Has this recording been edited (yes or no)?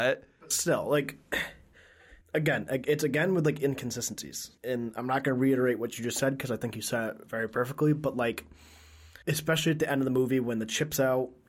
yes